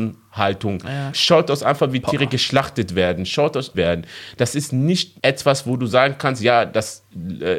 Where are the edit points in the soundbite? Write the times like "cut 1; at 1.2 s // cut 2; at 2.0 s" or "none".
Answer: cut 1; at 3.7 s // cut 2; at 5.2 s

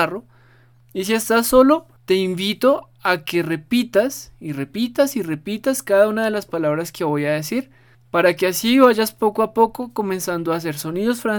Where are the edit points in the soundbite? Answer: cut 1; at 2.0 s // cut 2; at 7.9 s

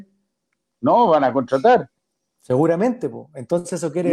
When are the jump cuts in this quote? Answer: none

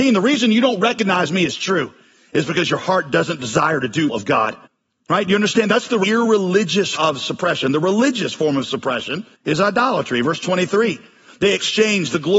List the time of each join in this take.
cut 1; at 4.1 s // cut 2; at 4.7 s // cut 3; at 7.0 s // cut 4; at 9.3 s

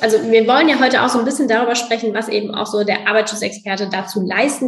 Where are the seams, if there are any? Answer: none

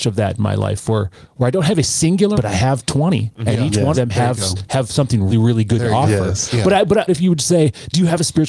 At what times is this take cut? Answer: cut 1; at 2.3 s // cut 2; at 3.9 s // cut 3; at 5.3 s // cut 4; at 7.1 s

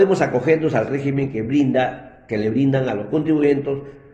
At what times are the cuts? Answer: none

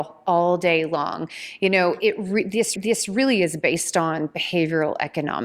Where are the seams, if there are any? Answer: cut 1; at 2.8 s

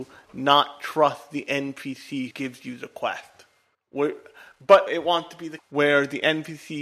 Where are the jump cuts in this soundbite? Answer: cut 1; at 2.3 s // cut 2; at 3.7 s // cut 3; at 4.9 s // cut 4; at 5.6 s

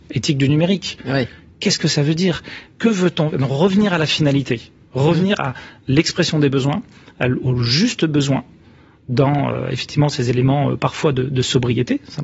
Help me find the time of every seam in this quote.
none

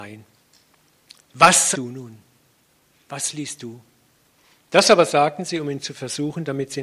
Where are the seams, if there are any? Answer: cut 1; at 1.7 s // cut 2; at 4.3 s

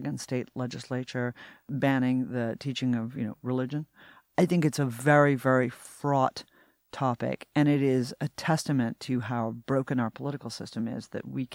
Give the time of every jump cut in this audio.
none

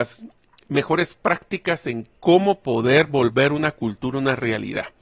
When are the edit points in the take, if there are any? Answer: none

